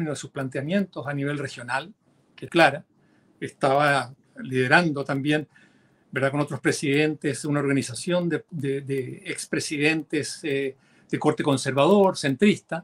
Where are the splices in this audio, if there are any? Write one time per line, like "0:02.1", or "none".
0:02.5